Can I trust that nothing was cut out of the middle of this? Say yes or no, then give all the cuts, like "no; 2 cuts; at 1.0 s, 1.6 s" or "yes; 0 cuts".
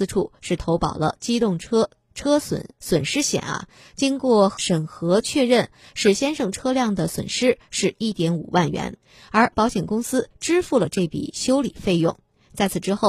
no; 1 cut; at 9.5 s